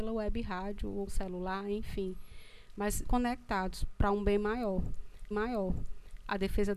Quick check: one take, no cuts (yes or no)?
no